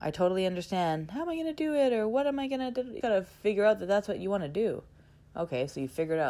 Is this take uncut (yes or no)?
no